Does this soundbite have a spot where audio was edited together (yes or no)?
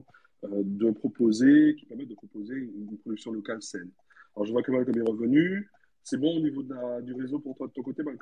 no